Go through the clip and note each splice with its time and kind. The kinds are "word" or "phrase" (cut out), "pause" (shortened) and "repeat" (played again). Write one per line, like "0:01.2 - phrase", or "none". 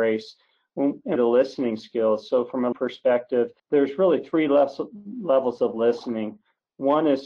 0:01.2 - phrase
0:02.7 - word
0:03.6 - pause

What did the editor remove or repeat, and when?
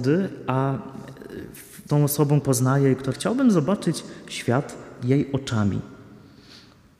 0:01.9 - word
0:02.4 - word
0:03.1 - phrase

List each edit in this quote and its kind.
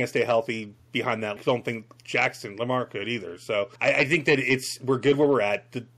0:01.4 - phrase
0:03.8 - pause

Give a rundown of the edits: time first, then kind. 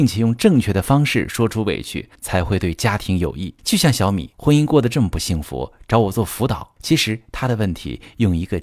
0:02.1 - pause
0:03.6 - pause
0:04.3 - pause
0:06.8 - pause

